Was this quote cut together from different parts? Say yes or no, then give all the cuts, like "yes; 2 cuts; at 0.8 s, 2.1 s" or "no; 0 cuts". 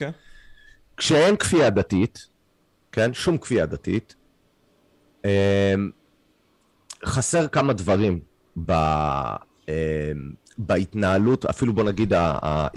yes; 1 cut; at 8.6 s